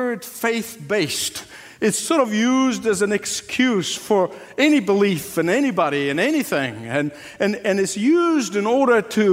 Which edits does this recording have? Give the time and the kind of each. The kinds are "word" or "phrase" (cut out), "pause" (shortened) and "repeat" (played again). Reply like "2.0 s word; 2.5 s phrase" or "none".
none